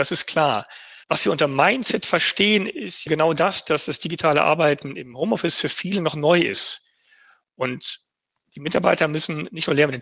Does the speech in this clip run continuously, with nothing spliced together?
no; 2 cuts; at 1.0 s, 3.1 s

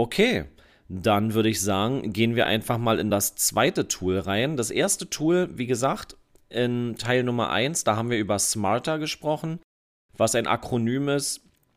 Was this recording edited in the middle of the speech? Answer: no; 0 cuts

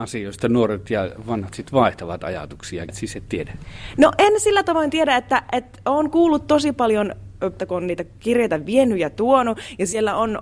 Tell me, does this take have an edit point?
yes; 2 cuts; at 2.9 s, 7.6 s

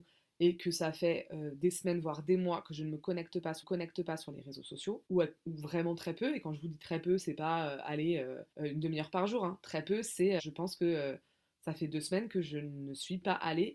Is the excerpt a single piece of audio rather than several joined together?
no; 4 cuts; at 3.6 s, 5.1 s, 8.5 s, 10.4 s

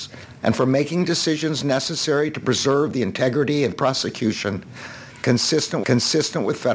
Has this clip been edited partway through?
yes; 2 cuts; at 3.7 s, 5.8 s

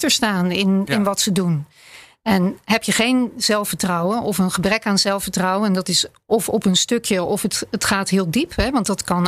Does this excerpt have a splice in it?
no; 0 cuts

